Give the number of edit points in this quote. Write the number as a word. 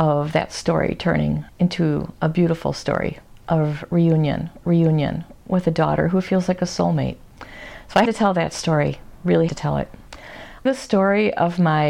five